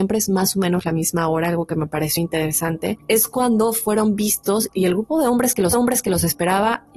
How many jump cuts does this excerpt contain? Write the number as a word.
two